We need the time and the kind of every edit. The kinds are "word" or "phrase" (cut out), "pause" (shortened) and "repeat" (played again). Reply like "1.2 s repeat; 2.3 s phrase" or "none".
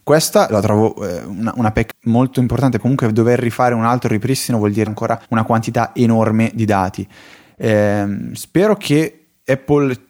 1.9 s word; 2.8 s word; 4.9 s word; 5.2 s pause